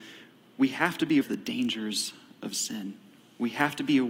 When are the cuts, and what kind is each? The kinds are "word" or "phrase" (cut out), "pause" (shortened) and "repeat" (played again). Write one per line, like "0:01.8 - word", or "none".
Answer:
0:01.2 - word